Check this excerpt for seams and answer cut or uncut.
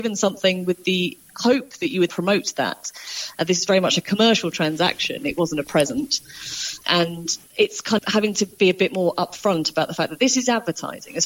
cut